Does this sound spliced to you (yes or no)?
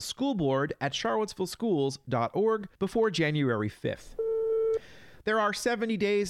yes